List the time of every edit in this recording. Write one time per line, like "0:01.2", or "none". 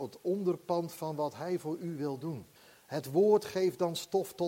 0:02.5